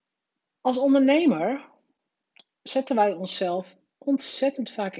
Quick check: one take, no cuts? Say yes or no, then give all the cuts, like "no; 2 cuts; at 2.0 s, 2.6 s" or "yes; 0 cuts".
yes; 0 cuts